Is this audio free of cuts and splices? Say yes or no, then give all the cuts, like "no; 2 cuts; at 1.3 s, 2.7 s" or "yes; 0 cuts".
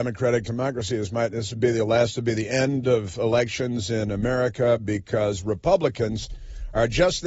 yes; 0 cuts